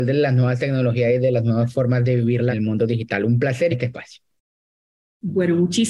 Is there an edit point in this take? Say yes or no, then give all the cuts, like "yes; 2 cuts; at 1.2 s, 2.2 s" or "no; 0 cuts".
yes; 2 cuts; at 2.5 s, 3.7 s